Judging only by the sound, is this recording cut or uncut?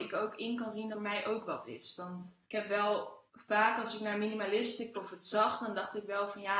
cut